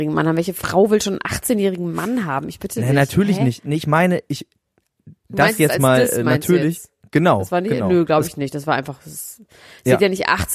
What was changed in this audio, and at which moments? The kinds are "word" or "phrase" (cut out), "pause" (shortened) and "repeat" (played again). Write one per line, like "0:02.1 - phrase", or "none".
0:05.2 - pause